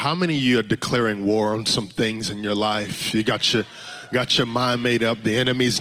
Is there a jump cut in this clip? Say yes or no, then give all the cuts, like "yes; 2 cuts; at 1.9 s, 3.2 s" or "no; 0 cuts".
no; 0 cuts